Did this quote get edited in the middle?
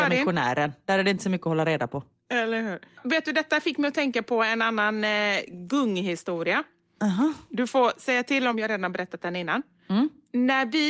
no; 0 cuts

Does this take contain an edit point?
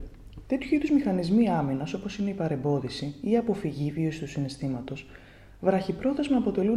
no; 0 cuts

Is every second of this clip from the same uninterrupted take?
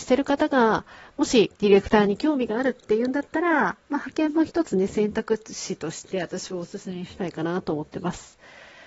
no; 1 cut; at 1.6 s

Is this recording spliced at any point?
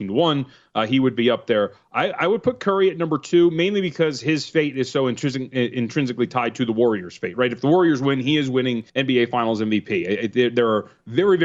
yes; 1 cut; at 8.9 s

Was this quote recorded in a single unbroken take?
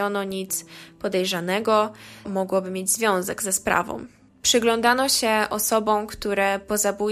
no; 1 cut; at 2.2 s

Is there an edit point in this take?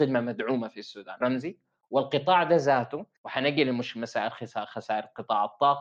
yes; 2 cuts; at 1.2 s, 3.2 s

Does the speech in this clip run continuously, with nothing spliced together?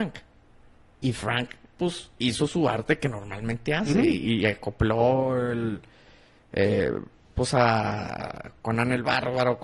yes; 0 cuts

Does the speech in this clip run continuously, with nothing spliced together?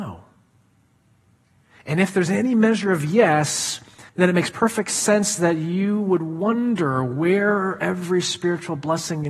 no; 1 cut; at 4.1 s

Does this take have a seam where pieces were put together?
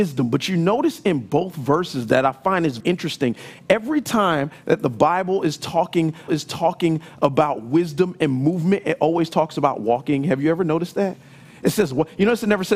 yes; 2 cuts; at 2.8 s, 6.3 s

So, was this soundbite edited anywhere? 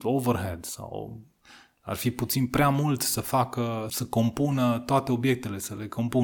yes; 1 cut; at 3.9 s

